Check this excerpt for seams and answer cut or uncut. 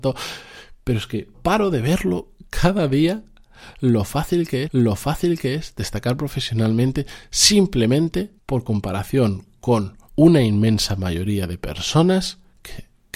cut